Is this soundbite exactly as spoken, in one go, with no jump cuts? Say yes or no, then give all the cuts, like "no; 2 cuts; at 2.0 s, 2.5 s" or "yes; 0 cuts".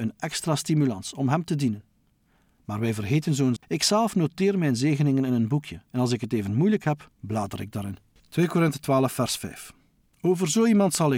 no; 3 cuts; at 3.6 s, 5.9 s, 8.2 s